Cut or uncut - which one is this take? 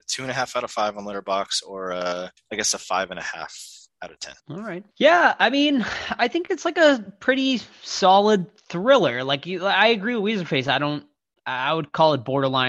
cut